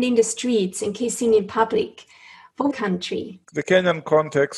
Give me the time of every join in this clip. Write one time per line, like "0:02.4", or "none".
0:02.7
0:03.4